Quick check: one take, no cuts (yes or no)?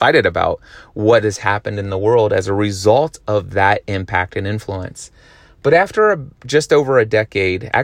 yes